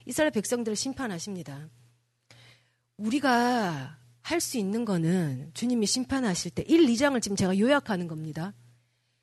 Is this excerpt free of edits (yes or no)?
yes